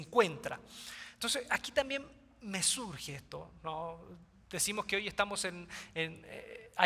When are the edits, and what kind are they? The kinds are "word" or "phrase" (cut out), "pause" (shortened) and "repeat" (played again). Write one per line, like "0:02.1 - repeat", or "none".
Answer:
none